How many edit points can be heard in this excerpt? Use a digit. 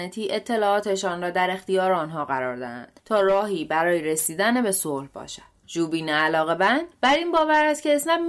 0